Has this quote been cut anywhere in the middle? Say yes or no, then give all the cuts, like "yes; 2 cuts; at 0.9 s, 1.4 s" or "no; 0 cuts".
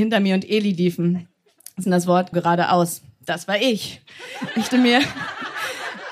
yes; 3 cuts; at 1.8 s, 2.3 s, 4.7 s